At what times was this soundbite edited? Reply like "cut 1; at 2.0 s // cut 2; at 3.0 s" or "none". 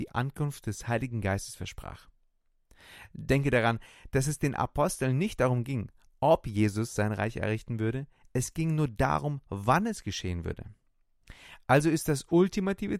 none